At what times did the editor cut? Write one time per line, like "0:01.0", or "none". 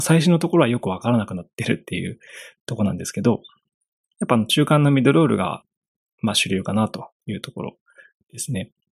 none